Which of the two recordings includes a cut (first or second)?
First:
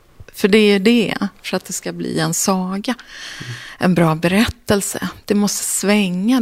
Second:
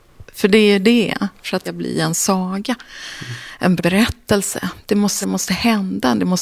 second